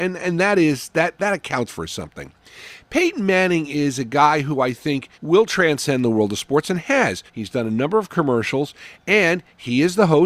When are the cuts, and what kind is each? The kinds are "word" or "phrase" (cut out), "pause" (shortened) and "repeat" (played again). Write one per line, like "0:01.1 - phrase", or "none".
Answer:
0:05.1 - pause
0:07.3 - pause